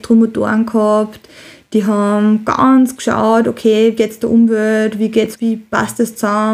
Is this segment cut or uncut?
cut